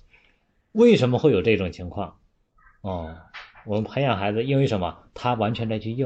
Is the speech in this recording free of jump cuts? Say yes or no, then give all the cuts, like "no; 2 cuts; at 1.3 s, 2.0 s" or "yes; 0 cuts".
yes; 0 cuts